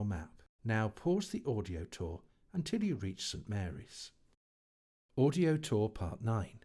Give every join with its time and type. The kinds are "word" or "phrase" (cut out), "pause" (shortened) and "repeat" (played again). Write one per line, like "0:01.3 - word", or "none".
none